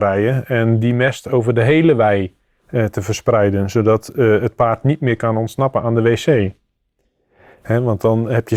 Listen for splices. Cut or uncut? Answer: uncut